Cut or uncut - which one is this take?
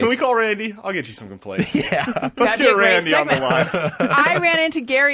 uncut